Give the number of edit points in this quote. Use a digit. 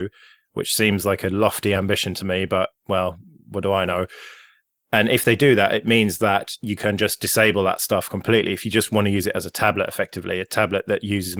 0